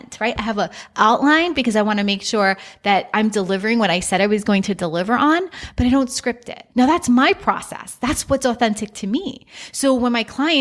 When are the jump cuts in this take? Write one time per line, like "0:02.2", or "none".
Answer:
0:06.7